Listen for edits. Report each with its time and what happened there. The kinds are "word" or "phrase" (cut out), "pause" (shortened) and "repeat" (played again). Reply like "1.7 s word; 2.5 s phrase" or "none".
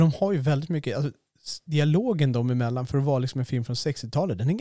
none